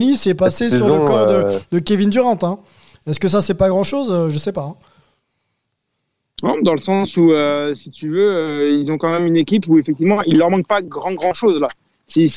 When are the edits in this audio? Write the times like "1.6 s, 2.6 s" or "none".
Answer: none